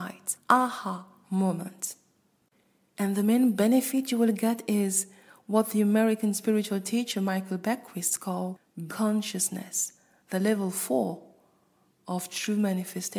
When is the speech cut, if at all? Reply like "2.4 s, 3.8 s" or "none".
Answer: 8.9 s